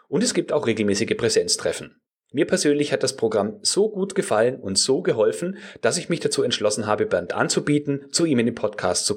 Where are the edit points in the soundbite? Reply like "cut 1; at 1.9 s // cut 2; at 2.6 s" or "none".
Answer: cut 1; at 2.1 s